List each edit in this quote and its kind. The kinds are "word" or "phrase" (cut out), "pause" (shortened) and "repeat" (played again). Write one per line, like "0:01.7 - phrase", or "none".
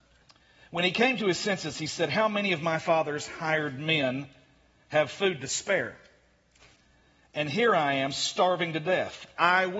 none